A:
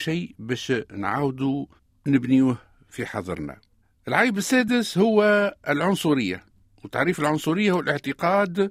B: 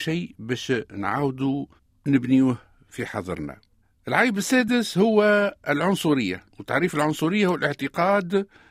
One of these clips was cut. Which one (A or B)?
B